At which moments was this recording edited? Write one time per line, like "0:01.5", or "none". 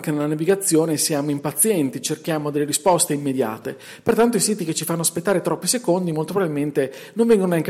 none